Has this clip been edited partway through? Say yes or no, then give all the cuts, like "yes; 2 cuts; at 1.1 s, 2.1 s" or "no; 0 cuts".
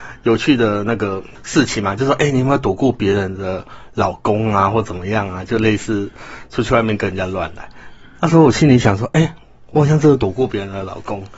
no; 0 cuts